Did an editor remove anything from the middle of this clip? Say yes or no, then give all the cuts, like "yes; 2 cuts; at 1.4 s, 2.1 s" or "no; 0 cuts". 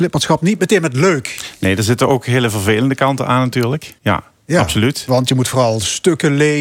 yes; 1 cut; at 4.0 s